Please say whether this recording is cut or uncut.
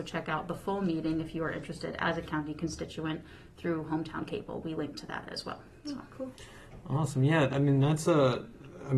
uncut